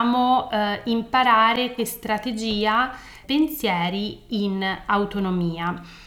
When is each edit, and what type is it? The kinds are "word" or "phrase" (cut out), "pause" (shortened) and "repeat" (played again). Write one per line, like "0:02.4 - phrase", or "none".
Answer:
0:01.8 - word
0:03.2 - phrase